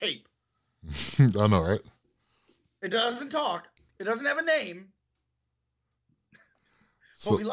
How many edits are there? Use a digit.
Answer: 0